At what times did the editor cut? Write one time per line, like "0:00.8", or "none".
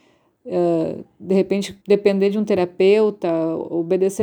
0:01.8